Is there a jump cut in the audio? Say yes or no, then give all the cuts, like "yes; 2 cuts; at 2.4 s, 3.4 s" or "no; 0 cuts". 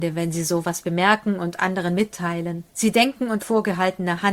yes; 2 cuts; at 2.7 s, 3.4 s